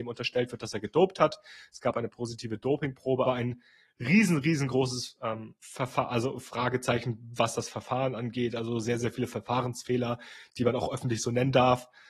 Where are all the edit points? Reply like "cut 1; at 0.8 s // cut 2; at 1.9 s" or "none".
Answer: cut 1; at 3.3 s // cut 2; at 5.6 s